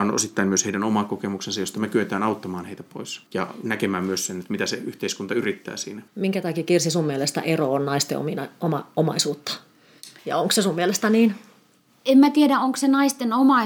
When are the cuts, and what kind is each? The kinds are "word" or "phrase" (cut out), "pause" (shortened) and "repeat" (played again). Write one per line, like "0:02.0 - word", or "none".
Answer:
0:03.3 - pause
0:06.1 - pause
0:10.2 - pause